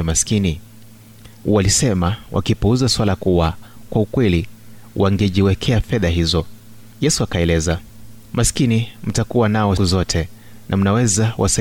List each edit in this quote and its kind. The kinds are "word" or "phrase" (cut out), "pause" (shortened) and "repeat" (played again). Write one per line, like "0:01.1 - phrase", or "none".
0:03.9 - word
0:06.9 - pause
0:08.2 - pause
0:09.8 - word